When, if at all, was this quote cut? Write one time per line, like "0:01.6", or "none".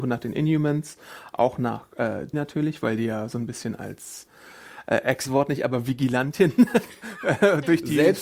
0:02.3
0:05.3